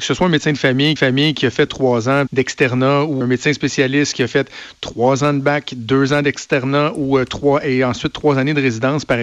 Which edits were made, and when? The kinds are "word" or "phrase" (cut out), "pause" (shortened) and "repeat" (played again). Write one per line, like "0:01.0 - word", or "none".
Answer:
0:01.0 - repeat
0:01.7 - phrase
0:02.3 - phrase
0:03.2 - word